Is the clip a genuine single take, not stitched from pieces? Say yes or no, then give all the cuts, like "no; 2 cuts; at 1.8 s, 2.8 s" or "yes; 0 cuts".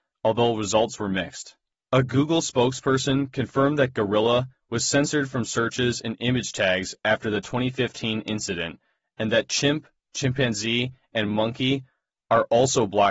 yes; 0 cuts